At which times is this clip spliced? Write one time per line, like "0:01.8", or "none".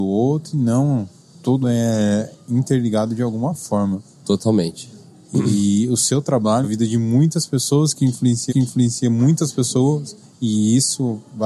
0:01.6
0:06.6
0:08.5
0:10.2